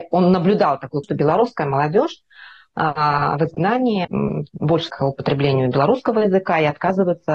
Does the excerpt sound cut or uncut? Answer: cut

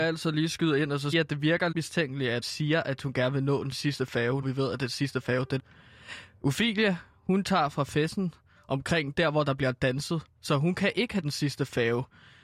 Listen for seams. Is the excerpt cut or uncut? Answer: cut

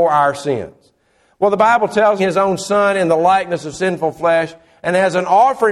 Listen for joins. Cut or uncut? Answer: cut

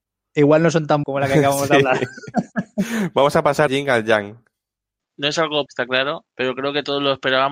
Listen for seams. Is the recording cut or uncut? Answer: cut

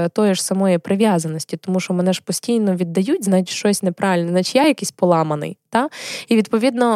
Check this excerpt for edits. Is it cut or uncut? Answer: uncut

